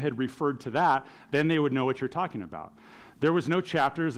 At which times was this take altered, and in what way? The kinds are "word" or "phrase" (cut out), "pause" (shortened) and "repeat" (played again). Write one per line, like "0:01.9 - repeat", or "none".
none